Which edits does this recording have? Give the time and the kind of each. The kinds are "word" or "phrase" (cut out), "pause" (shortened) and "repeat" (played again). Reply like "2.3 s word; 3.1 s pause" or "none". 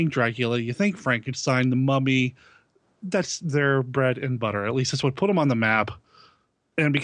none